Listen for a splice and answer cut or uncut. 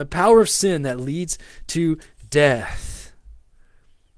uncut